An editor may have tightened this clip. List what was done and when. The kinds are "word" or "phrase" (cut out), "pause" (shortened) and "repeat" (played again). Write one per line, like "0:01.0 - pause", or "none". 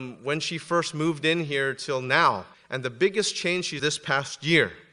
0:02.5 - pause
0:03.8 - phrase